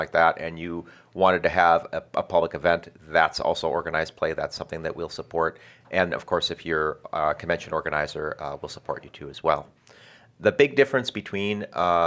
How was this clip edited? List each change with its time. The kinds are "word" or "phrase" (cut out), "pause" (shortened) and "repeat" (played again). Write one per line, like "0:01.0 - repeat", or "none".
0:06.1 - word